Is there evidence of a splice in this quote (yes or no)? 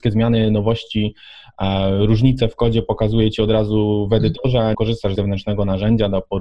yes